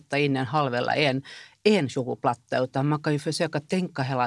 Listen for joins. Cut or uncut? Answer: uncut